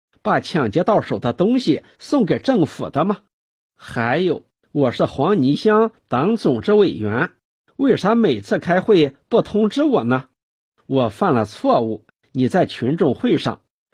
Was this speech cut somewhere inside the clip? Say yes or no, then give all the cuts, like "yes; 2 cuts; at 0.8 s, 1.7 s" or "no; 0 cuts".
no; 0 cuts